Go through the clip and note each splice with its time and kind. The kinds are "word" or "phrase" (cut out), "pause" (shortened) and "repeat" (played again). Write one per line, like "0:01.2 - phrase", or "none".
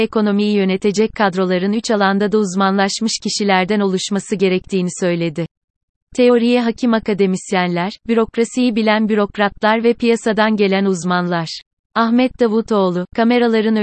none